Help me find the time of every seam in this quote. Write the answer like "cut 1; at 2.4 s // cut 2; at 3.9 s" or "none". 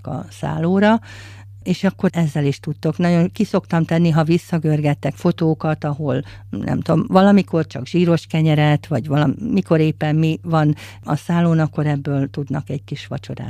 cut 1; at 2.1 s // cut 2; at 5.1 s